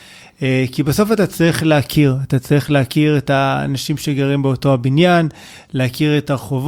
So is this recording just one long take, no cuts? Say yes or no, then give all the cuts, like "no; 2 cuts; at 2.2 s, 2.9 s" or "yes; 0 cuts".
yes; 0 cuts